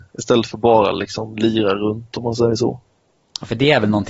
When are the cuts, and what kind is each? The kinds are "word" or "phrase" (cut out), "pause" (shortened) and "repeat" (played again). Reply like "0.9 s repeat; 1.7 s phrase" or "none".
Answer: none